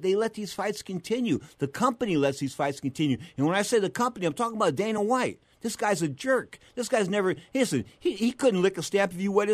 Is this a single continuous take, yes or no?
yes